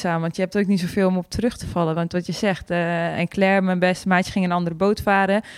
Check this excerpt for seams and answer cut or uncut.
uncut